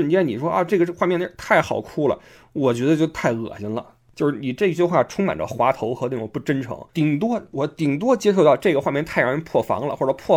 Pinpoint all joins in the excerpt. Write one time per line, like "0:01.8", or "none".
0:06.9